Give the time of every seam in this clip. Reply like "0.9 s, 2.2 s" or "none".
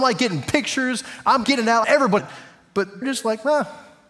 1.4 s, 1.8 s, 2.2 s, 3.0 s

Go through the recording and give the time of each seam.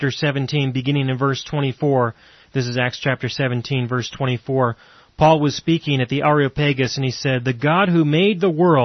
none

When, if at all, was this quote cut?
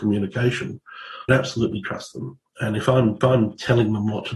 1.3 s, 3.2 s

